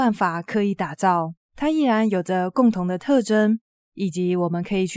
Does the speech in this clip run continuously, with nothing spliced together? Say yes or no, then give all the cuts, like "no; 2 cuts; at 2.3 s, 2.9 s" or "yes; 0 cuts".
no; 1 cut; at 1.4 s